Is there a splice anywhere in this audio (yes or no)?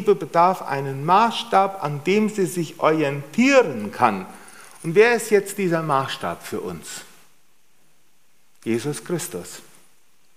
no